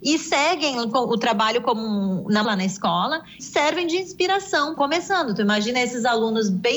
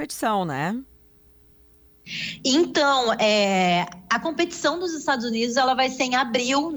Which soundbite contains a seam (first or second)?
first